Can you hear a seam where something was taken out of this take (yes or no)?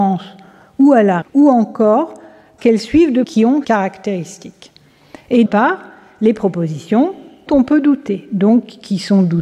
yes